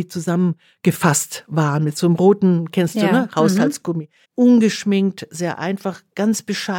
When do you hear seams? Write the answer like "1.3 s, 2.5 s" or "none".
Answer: 4.2 s